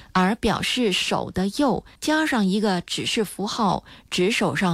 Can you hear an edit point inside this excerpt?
yes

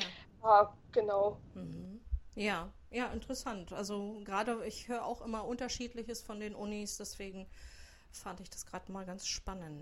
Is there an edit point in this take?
no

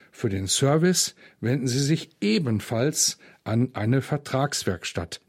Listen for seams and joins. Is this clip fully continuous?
yes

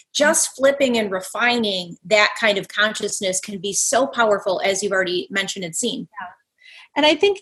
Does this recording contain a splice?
no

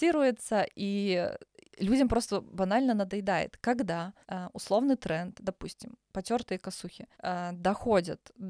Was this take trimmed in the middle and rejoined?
yes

